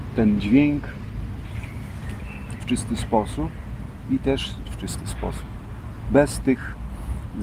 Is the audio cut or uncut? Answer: cut